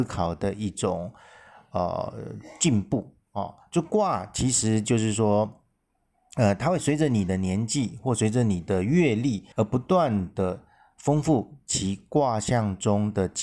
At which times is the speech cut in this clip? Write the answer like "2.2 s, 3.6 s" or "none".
9.5 s